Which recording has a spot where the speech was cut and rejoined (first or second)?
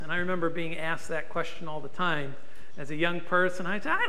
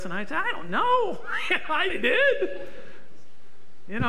second